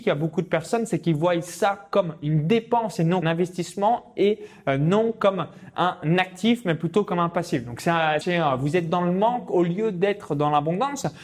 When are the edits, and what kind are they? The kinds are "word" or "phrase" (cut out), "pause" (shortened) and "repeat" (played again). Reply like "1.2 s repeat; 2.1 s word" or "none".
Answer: 3.2 s phrase; 8.2 s phrase